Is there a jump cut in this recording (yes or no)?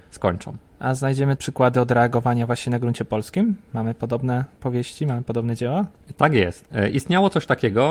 yes